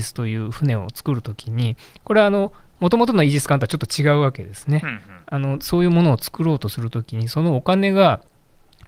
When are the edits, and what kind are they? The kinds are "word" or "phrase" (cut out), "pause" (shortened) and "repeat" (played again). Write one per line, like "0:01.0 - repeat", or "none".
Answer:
none

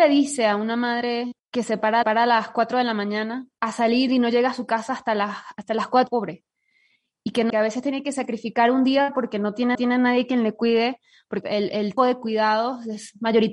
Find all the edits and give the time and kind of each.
0:01.4 - pause
0:02.0 - repeat
0:03.5 - pause
0:06.1 - phrase
0:07.5 - phrase
0:09.7 - repeat
0:11.4 - word
0:12.0 - word

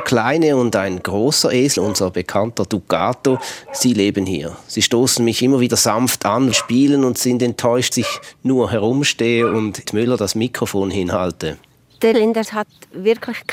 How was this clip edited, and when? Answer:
0:01.8 - word
0:06.5 - word
0:07.9 - word
0:09.8 - word
0:12.1 - word
0:12.4 - word

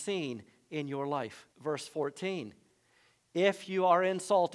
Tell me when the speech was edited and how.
0:01.5 - pause

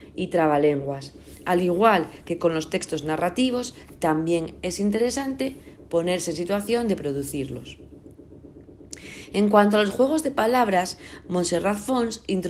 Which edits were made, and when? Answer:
none

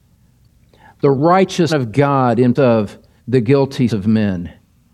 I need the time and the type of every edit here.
0:01.7 - word
0:02.6 - word
0:03.2 - pause
0:03.9 - word

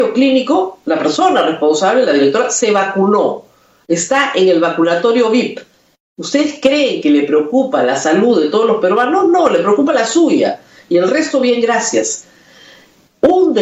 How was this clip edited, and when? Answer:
none

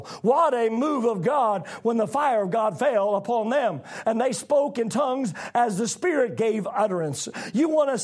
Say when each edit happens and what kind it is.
none

